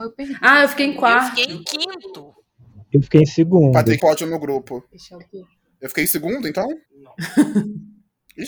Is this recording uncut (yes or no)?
no